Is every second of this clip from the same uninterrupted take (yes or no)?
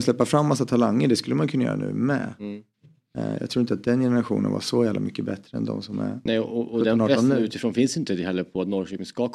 yes